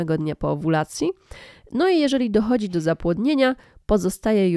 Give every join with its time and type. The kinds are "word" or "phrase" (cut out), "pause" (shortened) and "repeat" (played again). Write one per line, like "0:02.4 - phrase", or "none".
none